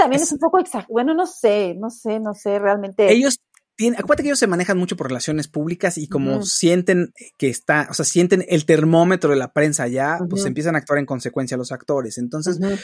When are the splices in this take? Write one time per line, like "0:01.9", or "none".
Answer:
none